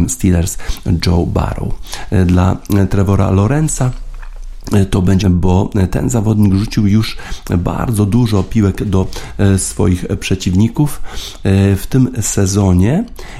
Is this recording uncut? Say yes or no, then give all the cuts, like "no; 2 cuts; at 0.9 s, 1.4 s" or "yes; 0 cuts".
no; 1 cut; at 5.2 s